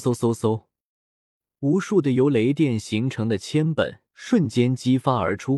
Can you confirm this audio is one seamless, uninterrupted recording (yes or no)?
no